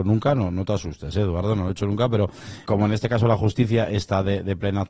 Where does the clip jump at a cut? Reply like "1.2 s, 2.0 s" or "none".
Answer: 2.6 s